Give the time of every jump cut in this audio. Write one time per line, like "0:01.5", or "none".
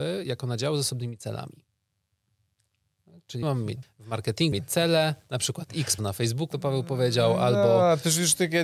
0:03.4
0:03.8
0:04.5
0:06.0
0:06.5